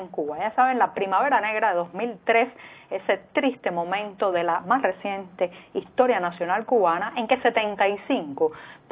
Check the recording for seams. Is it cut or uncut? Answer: uncut